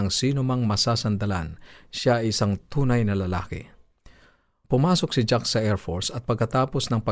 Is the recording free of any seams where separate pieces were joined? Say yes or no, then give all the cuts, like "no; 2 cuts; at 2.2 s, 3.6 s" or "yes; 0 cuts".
yes; 0 cuts